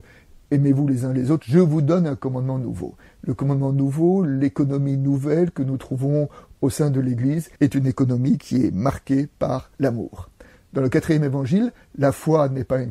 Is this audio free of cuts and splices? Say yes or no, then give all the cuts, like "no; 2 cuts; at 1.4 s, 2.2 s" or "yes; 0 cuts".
no; 2 cuts; at 7.6 s, 9.7 s